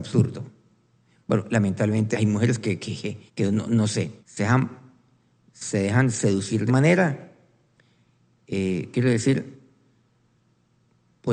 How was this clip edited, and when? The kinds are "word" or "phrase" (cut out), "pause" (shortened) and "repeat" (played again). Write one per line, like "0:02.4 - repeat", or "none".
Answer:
0:02.1 - word
0:03.3 - pause
0:04.2 - pause
0:06.7 - phrase